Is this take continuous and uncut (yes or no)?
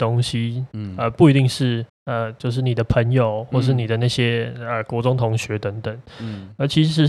no